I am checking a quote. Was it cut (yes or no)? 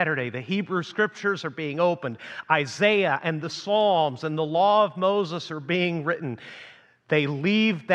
no